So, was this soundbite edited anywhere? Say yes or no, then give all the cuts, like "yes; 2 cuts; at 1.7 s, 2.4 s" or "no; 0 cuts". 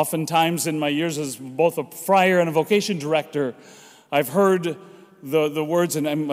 no; 0 cuts